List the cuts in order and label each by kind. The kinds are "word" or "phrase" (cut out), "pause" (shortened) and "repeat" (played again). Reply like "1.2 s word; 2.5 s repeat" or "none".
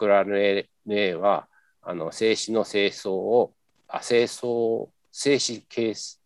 none